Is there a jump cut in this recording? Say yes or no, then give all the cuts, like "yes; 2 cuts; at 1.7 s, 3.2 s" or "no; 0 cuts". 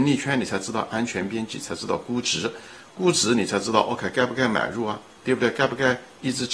no; 0 cuts